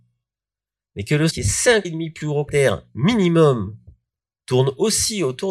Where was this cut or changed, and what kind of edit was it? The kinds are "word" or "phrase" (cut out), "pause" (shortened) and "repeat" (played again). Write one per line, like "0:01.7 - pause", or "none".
0:01.3 - word
0:01.8 - word
0:02.5 - word